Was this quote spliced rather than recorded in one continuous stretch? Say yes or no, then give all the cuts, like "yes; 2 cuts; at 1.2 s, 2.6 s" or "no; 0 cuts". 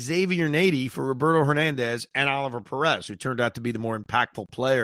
no; 0 cuts